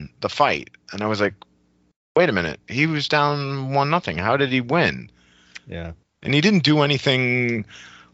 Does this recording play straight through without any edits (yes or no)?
no